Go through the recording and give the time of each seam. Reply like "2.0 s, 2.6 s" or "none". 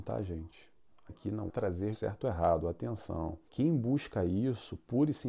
1.1 s, 1.5 s, 1.9 s, 3.5 s